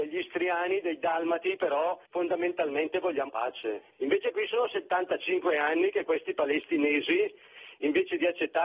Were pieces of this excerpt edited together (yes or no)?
yes